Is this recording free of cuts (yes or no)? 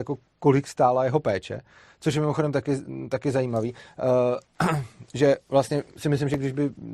yes